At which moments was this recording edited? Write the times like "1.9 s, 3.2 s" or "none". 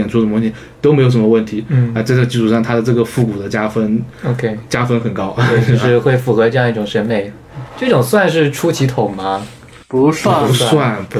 7.7 s